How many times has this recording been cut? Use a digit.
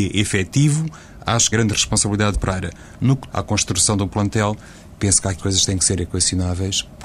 4